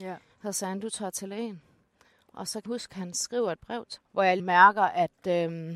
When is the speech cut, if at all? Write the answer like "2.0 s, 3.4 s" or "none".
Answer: 2.7 s, 4.0 s, 4.4 s